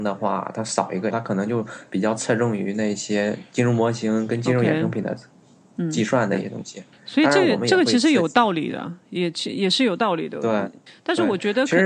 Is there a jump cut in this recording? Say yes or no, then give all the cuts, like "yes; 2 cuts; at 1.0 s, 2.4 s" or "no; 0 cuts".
yes; 3 cuts; at 1.1 s, 6.9 s, 10.9 s